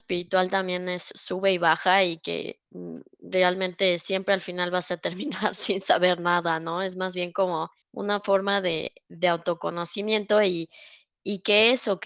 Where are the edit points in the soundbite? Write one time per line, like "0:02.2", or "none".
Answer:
0:07.8